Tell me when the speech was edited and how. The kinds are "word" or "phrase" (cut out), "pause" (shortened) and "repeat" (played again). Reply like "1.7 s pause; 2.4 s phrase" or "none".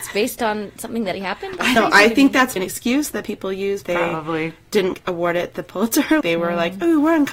1.1 s word; 1.8 s word; 2.6 s word; 3.8 s word; 4.9 s word; 6.2 s word